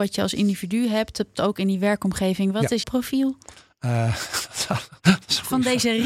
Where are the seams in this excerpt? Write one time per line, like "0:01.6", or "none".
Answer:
0:01.4
0:02.8